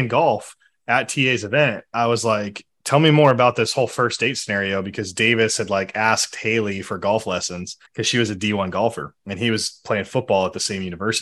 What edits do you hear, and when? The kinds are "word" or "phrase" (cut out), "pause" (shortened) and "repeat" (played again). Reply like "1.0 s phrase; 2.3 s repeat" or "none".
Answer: 7.9 s pause; 9.2 s pause